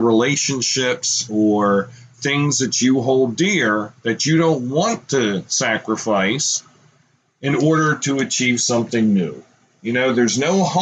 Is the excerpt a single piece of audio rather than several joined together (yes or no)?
yes